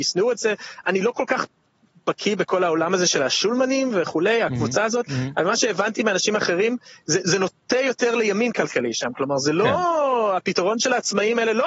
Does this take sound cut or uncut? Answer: uncut